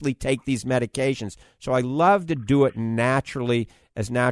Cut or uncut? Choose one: uncut